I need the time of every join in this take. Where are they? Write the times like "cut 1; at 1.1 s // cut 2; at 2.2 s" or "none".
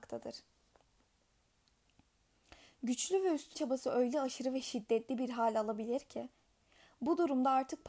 cut 1; at 3.5 s